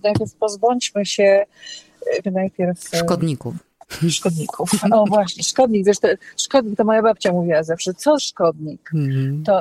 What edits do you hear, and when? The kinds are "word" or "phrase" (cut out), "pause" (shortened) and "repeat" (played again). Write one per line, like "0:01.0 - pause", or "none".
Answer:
0:02.2 - phrase
0:08.2 - word